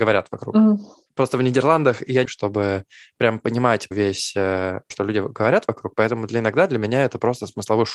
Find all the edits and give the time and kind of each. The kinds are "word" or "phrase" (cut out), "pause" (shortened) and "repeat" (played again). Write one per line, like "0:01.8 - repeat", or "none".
0:02.2 - phrase
0:03.9 - word
0:04.9 - phrase